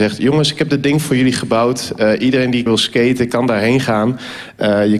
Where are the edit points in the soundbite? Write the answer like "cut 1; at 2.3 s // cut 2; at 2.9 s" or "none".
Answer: cut 1; at 2.7 s